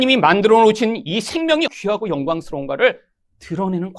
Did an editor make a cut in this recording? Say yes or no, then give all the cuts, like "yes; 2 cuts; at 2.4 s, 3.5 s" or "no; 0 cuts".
yes; 1 cut; at 1.7 s